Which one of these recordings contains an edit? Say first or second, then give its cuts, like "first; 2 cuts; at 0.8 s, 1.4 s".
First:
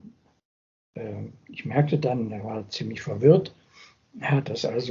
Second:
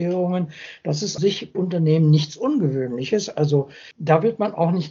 second; 2 cuts; at 1.2 s, 1.5 s